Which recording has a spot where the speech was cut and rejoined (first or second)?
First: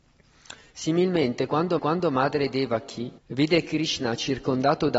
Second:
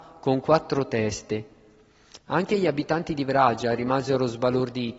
first